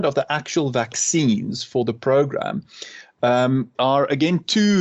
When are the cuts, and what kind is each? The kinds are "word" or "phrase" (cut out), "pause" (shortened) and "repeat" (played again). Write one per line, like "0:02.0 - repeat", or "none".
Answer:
0:03.8 - word